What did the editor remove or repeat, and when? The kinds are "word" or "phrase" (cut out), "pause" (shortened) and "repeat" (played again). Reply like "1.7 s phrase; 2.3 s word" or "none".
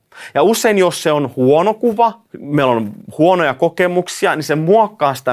2.3 s pause